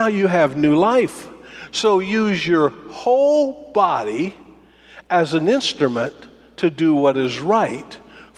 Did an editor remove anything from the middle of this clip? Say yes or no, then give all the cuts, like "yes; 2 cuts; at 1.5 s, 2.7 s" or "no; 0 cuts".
no; 0 cuts